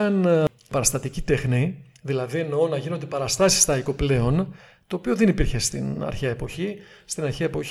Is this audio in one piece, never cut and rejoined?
yes; 0 cuts

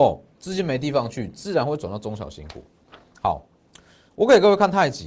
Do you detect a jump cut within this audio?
yes; 1 cut; at 4.1 s

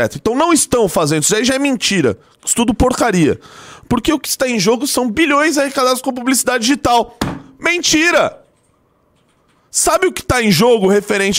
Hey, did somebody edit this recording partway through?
no; 0 cuts

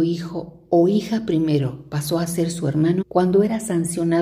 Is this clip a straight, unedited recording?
no; 1 cut; at 3.0 s

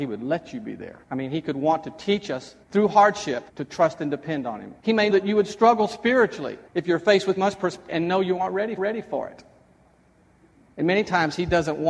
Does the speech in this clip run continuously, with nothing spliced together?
no; 9 cuts; at 1.0 s, 2.6 s, 3.5 s, 4.8 s, 5.1 s, 6.7 s, 7.4 s, 7.9 s, 8.8 s

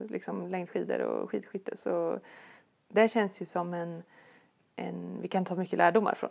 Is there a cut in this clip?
no; 0 cuts

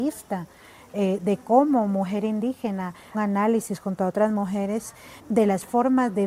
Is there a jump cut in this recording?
yes; 2 cuts; at 3.1 s, 5.2 s

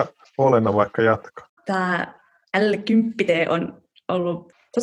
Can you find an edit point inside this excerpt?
yes; 1 cut; at 1.6 s

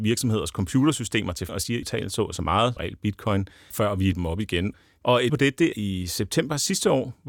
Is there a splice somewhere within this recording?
yes; 7 cuts; at 1.5 s, 1.8 s, 2.8 s, 3.7 s, 4.1 s, 5.3 s, 5.7 s

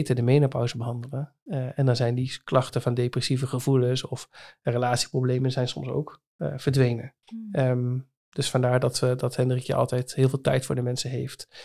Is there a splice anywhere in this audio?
yes; 1 cut; at 7.2 s

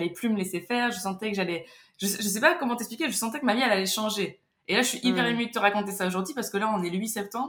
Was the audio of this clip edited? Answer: no; 0 cuts

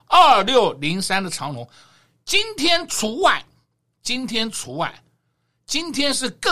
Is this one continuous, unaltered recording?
yes; 0 cuts

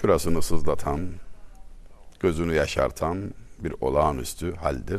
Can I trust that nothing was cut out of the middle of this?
yes; 0 cuts

